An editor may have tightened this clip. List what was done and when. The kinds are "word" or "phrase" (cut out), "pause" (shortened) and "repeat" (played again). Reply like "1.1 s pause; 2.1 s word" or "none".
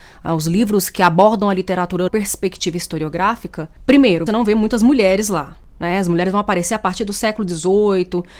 2.1 s word; 4.3 s word